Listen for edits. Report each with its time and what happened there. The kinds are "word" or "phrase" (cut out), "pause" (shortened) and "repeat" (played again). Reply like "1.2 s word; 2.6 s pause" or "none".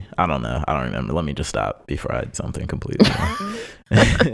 2.3 s word